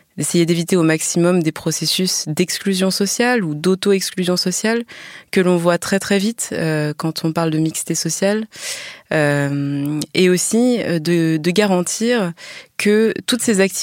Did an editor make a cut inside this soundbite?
no; 0 cuts

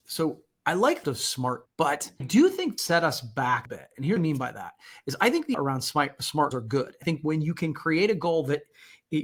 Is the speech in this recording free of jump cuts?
no; 9 cuts; at 1.0 s, 1.7 s, 2.2 s, 2.8 s, 3.7 s, 4.2 s, 5.5 s, 6.5 s, 7.0 s

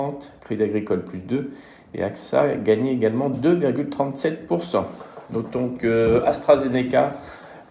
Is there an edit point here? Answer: no; 0 cuts

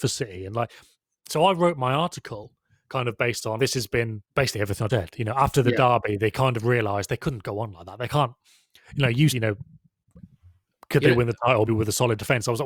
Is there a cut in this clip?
yes; 5 cuts; at 3.6 s, 4.3 s, 4.9 s, 9.3 s, 11.7 s

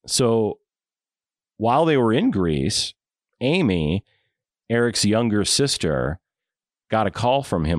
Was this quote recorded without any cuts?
yes; 0 cuts

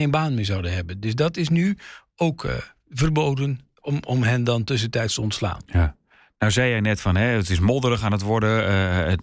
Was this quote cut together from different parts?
no; 0 cuts

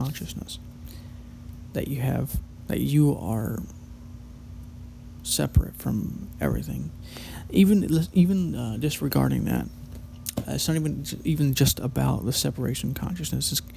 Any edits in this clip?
no; 0 cuts

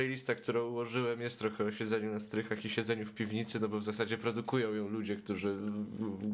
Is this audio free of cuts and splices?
yes; 0 cuts

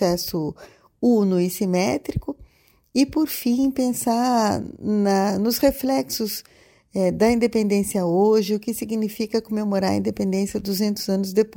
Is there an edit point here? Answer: no; 0 cuts

